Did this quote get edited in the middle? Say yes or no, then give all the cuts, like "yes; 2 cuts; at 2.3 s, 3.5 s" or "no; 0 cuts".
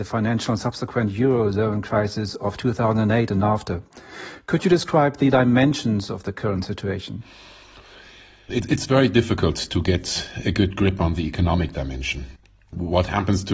no; 0 cuts